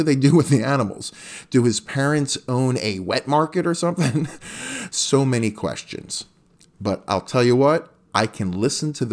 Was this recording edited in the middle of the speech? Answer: yes; 1 cut; at 4.9 s

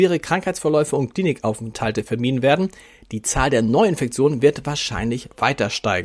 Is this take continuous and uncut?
yes; 0 cuts

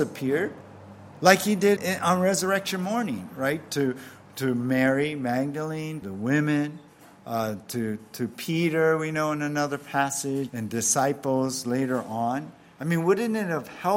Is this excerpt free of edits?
no; 3 cuts; at 1.8 s, 6.0 s, 10.5 s

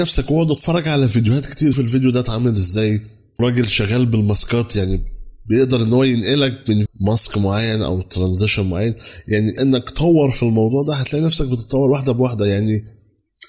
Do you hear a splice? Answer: yes; 4 cuts; at 1.7 s, 3.4 s, 6.9 s, 9.6 s

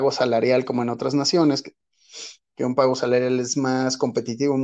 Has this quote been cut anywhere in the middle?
no; 0 cuts

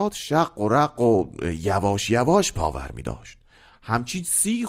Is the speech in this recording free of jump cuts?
yes; 0 cuts

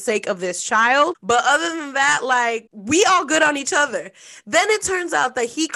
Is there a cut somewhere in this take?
no; 0 cuts

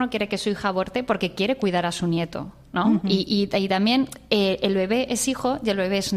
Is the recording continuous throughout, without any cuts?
yes; 0 cuts

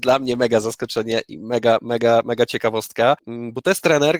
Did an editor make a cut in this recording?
no; 0 cuts

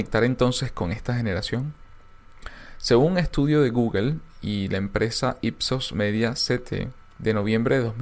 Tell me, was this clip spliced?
no; 0 cuts

